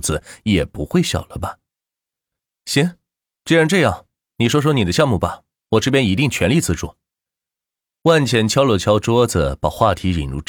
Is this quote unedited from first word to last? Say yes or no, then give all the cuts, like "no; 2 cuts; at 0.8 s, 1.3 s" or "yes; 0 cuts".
yes; 0 cuts